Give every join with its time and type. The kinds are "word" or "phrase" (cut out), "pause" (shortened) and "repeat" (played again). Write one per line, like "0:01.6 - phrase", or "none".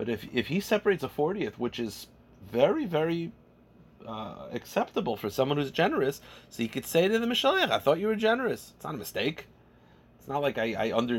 none